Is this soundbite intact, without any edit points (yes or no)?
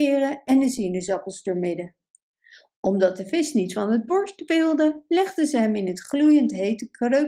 yes